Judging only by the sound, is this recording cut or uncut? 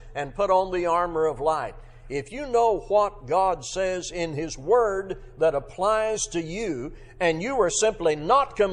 uncut